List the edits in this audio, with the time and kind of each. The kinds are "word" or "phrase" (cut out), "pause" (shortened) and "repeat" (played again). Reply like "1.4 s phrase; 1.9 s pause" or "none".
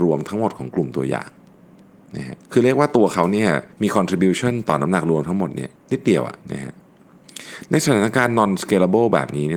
2.4 s pause; 3.7 s pause; 5.8 s pause; 6.4 s pause